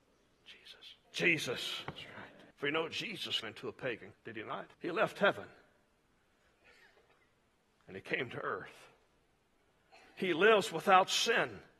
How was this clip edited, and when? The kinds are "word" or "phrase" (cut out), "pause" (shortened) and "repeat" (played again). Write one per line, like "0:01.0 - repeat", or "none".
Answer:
0:01.0 - pause
0:02.5 - pause
0:03.4 - word
0:04.1 - word
0:04.7 - pause